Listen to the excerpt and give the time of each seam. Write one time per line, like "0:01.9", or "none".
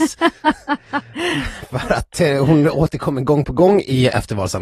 none

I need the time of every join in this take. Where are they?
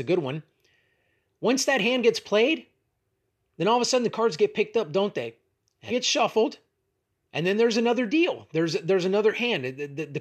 0:05.9

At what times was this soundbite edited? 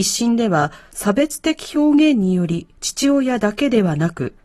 0:02.8

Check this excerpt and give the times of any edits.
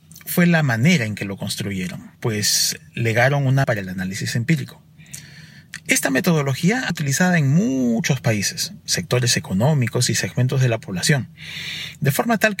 0:02.1
0:03.6
0:06.9

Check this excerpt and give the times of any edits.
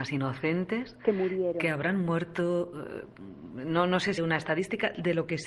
0:04.2

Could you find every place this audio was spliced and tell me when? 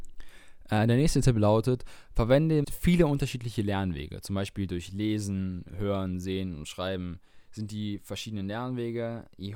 0:02.6

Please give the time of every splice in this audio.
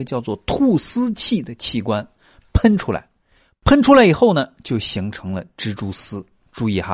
none

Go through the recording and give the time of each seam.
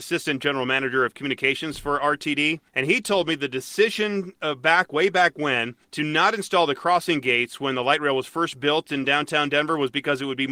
0:02.7
0:05.8

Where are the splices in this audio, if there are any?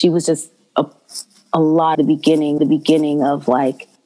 0:01.9
0:02.6

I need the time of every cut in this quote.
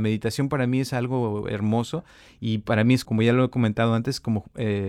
0:03.0

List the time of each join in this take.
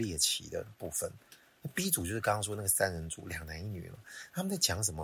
none

